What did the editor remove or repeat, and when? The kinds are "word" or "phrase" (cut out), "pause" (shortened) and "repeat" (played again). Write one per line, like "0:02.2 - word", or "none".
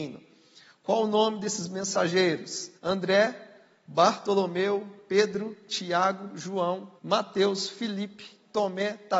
0:02.8 - pause
0:07.0 - pause